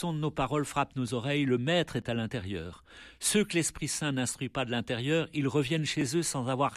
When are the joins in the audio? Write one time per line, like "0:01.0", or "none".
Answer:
none